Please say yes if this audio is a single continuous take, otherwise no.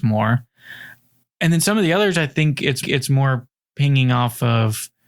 no